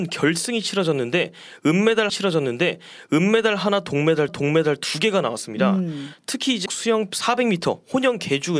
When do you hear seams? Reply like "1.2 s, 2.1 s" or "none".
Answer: 2.1 s, 4.3 s, 6.7 s